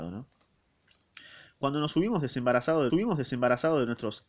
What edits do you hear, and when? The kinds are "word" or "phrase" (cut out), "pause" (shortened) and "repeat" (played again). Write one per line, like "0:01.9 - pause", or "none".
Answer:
0:02.9 - repeat